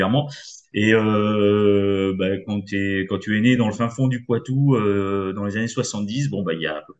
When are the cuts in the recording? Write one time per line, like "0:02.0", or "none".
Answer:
none